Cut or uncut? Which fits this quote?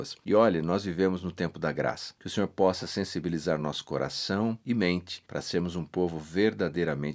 uncut